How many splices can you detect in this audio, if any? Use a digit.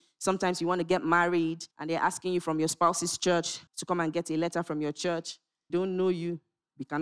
3